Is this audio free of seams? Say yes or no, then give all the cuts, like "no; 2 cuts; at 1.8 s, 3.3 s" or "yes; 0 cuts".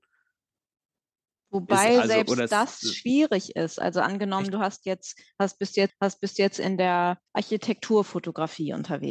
no; 2 cuts; at 5.9 s, 7.3 s